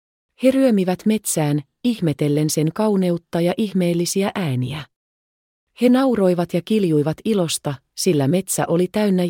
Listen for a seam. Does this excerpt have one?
no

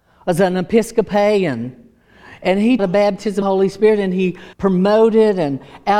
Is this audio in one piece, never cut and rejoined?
no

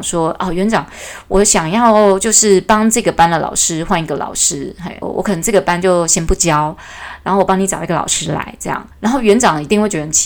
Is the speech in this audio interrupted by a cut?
yes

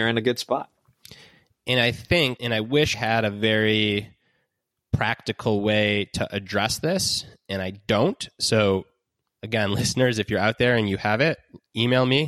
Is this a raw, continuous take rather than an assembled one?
no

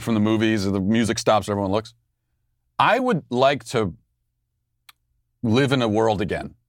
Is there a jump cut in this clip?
no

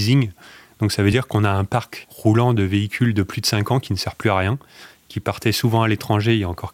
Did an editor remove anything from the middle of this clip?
no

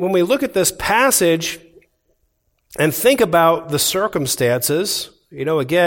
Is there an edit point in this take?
no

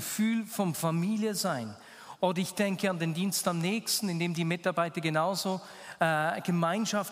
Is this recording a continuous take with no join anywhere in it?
yes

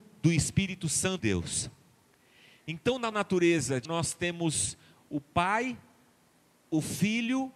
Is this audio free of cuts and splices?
no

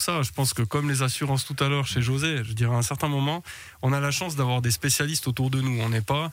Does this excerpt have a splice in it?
no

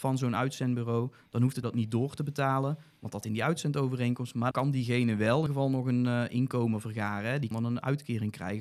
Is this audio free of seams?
no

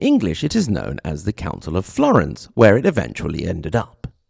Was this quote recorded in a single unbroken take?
yes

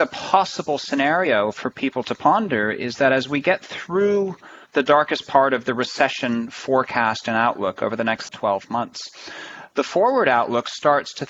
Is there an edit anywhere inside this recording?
yes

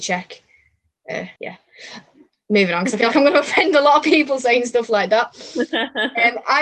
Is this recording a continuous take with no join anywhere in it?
no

